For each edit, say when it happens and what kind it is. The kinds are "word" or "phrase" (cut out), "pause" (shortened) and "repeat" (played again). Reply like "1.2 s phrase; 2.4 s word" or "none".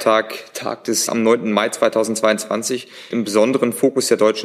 1.1 s word; 3.1 s word